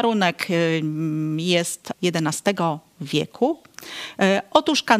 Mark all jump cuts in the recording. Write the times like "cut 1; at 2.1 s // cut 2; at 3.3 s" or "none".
cut 1; at 1.9 s